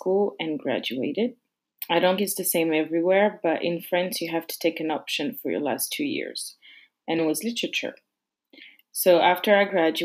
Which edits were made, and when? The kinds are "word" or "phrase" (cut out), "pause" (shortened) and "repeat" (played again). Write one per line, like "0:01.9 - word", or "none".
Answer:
0:02.2 - word
0:07.2 - word